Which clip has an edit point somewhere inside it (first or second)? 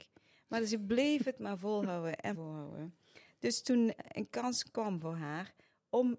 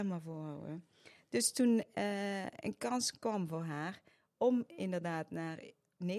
first